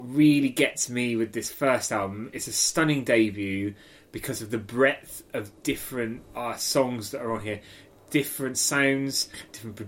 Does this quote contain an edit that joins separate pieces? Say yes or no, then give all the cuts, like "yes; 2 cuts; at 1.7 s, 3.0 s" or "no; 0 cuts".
no; 0 cuts